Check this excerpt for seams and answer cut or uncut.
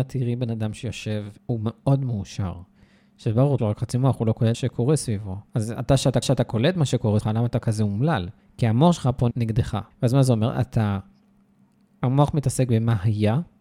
cut